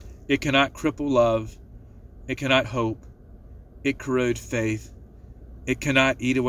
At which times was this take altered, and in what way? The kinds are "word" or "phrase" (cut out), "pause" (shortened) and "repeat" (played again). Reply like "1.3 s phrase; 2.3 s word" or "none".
2.6 s word; 4.0 s word